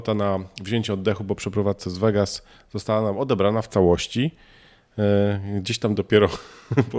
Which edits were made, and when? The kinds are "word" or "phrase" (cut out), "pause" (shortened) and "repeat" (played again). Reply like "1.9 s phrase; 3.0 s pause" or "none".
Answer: none

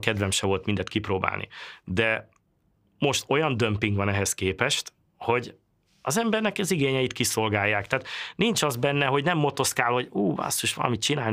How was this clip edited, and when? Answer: none

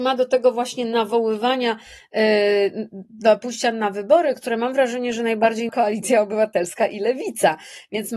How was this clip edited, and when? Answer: 5.7 s word

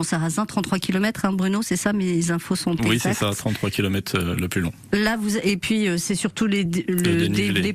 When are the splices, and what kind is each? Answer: none

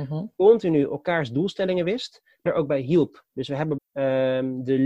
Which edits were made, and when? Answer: 2.5 s word; 3.8 s word

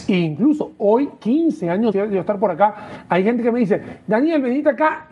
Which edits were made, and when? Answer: 1.9 s word

